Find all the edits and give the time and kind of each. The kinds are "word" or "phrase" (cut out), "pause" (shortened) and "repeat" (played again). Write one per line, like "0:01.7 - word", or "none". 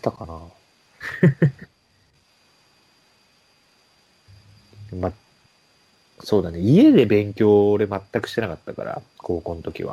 none